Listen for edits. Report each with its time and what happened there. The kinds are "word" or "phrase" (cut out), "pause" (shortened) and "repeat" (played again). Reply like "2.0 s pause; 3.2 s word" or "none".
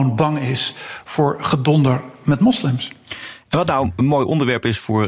none